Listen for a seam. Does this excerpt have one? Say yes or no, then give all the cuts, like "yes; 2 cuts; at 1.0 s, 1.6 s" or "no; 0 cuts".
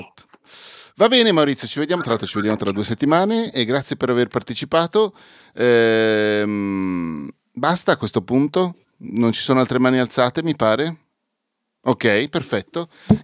no; 0 cuts